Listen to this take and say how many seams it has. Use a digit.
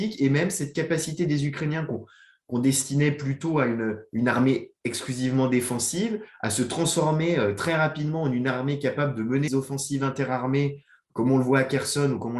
1